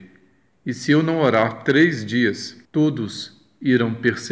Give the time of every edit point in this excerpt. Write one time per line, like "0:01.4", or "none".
0:02.6